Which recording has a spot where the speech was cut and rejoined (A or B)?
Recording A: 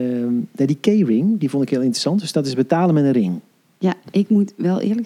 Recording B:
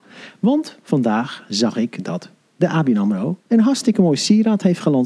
B